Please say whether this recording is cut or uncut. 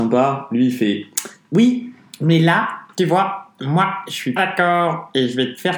cut